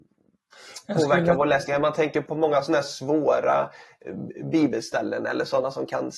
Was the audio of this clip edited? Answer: yes; 1 cut; at 2.3 s

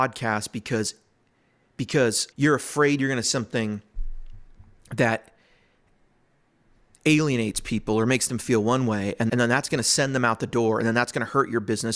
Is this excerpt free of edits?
no; 3 cuts; at 2.3 s, 3.2 s, 9.3 s

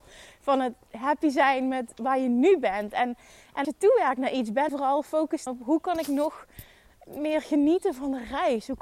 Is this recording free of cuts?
no; 3 cuts; at 3.6 s, 4.7 s, 5.5 s

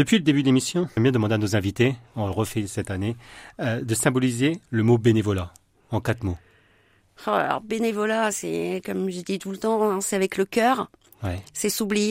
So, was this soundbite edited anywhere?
yes; 1 cut; at 1.0 s

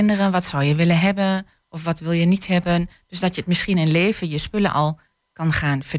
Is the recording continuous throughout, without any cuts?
yes; 0 cuts

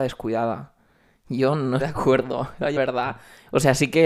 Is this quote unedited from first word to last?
no; 2 cuts; at 1.8 s, 2.8 s

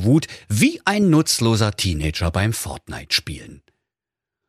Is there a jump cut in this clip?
no; 0 cuts

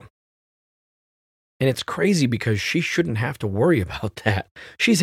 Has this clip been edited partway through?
no; 0 cuts

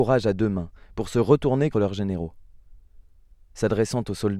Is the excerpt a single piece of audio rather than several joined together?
no; 1 cut; at 1.7 s

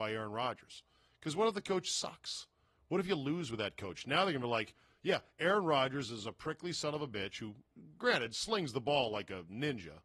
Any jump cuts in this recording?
no; 0 cuts

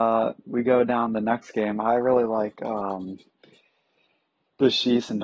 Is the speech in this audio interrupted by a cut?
no; 0 cuts

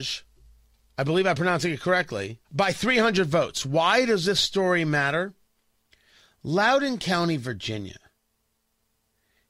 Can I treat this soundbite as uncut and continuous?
no; 1 cut; at 2.4 s

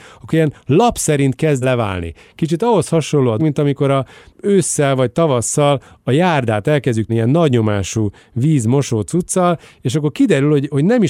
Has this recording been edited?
yes; 3 cuts; at 1.6 s, 3.4 s, 7.1 s

